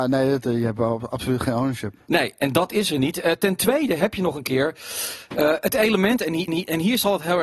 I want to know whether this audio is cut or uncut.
cut